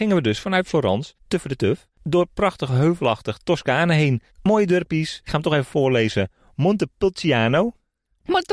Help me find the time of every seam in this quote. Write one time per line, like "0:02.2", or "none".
0:01.2
0:01.9
0:04.3
0:05.3